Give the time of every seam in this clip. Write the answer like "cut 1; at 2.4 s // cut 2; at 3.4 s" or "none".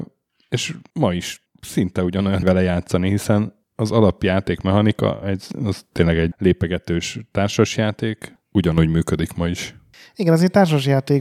cut 1; at 2.4 s // cut 2; at 6.3 s